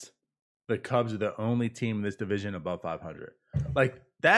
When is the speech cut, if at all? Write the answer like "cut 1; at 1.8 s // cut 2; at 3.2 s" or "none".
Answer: none